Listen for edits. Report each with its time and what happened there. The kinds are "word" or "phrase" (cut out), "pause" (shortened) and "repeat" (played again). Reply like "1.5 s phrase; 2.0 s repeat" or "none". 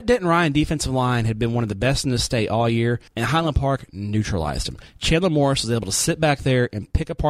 3.1 s pause